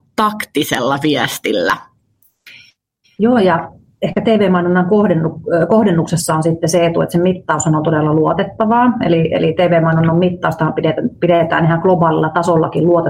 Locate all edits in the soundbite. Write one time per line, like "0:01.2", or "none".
none